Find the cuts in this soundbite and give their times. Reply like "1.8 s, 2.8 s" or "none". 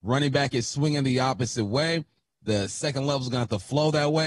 none